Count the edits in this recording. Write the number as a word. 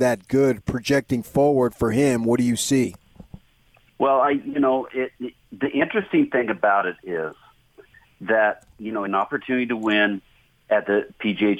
one